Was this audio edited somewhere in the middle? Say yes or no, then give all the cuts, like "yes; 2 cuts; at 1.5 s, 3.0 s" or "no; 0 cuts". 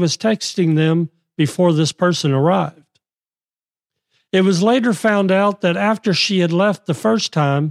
no; 0 cuts